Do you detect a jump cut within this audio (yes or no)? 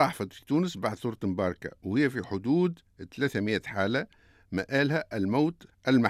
no